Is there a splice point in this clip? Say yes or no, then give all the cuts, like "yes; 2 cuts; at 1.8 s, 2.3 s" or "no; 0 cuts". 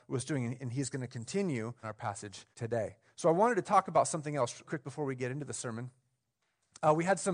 yes; 3 cuts; at 1.8 s, 2.5 s, 4.6 s